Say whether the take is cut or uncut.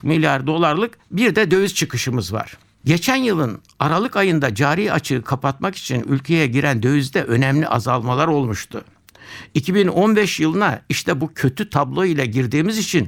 uncut